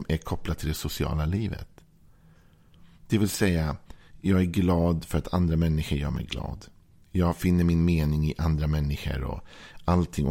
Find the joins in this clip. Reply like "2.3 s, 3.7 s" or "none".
none